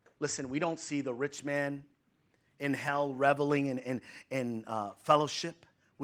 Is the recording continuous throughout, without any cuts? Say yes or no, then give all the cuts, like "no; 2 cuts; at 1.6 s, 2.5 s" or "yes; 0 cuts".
yes; 0 cuts